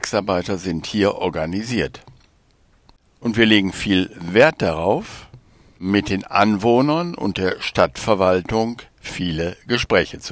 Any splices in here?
no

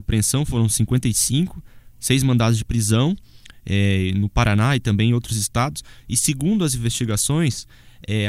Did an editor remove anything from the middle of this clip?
no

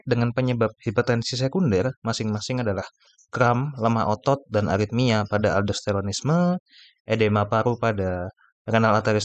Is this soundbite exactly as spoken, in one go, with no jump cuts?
yes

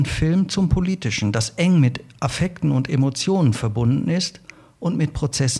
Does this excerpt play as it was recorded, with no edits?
yes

